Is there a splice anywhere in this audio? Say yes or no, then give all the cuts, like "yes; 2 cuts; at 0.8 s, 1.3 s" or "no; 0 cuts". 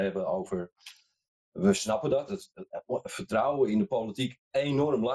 yes; 1 cut; at 2.3 s